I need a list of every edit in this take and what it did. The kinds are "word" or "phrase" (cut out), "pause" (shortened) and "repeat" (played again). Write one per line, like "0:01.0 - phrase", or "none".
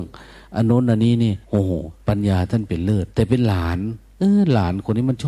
0:01.4 - pause
0:02.0 - pause
0:03.1 - pause